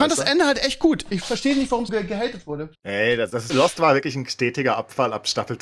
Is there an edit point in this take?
yes; 3 cuts; at 1.9 s, 2.8 s, 3.5 s

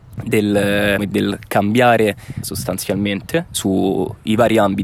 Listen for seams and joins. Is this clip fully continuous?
no; 2 cuts; at 1.0 s, 2.4 s

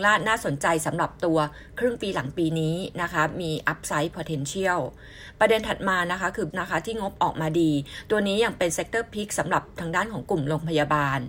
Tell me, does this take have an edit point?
yes; 1 cut; at 6.5 s

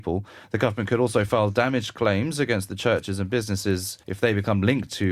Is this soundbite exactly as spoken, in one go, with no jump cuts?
no; 1 cut; at 4.0 s

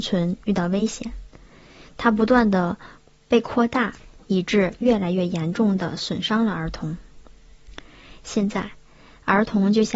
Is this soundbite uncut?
yes; 0 cuts

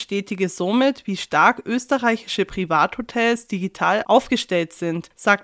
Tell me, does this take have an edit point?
no; 0 cuts

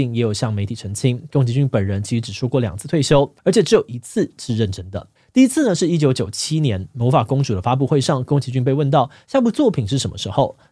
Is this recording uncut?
no; 2 cuts; at 3.4 s, 5.2 s

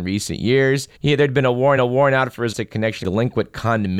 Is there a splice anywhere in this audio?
yes; 4 cuts; at 1.0 s, 1.8 s, 2.5 s, 3.0 s

